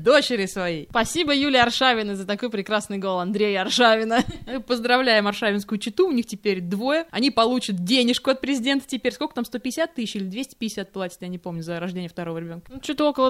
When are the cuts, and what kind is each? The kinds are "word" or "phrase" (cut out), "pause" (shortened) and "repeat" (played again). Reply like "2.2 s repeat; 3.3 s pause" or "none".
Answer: none